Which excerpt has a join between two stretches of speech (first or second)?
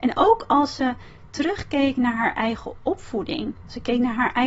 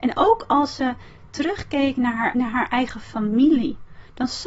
second